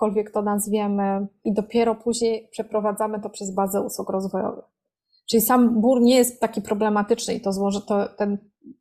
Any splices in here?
no; 0 cuts

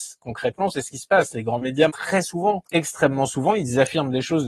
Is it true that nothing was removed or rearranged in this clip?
no; 2 cuts; at 1.9 s, 2.6 s

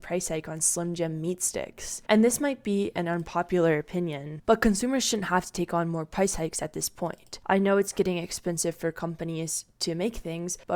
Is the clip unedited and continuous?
yes; 0 cuts

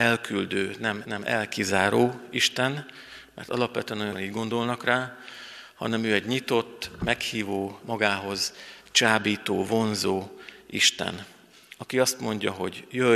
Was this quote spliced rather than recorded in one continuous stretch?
yes; 3 cuts; at 1.0 s, 4.1 s, 7.8 s

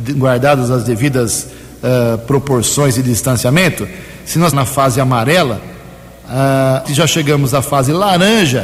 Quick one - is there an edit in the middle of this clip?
yes; 2 cuts; at 4.5 s, 6.8 s

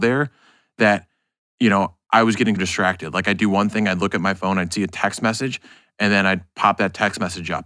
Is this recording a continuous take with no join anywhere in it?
no; 1 cut; at 2.6 s

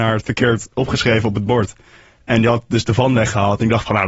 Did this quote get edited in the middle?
no; 0 cuts

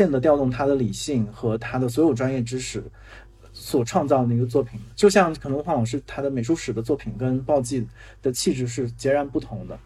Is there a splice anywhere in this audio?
no; 0 cuts

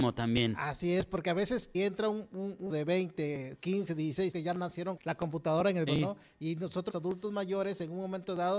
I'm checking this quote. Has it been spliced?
yes; 6 cuts; at 1.7 s, 2.7 s, 4.3 s, 5.0 s, 5.9 s, 6.9 s

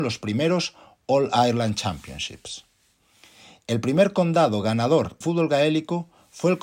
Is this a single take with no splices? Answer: no; 1 cut; at 5.2 s

